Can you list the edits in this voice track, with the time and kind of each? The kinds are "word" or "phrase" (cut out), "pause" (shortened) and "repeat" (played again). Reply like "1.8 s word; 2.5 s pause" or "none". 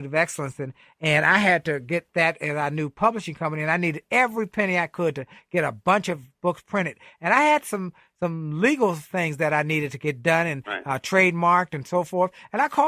none